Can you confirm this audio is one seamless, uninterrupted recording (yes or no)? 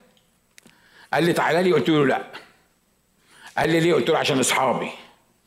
yes